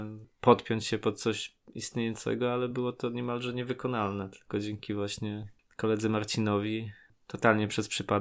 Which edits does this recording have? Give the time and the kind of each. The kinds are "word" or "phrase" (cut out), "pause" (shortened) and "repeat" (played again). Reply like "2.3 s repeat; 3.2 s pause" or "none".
none